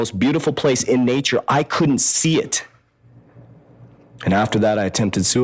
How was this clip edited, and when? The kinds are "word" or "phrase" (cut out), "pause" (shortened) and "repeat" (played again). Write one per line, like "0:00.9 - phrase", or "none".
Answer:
none